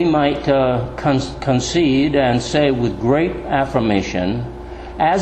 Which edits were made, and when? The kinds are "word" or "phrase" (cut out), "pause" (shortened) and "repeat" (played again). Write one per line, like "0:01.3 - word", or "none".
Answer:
none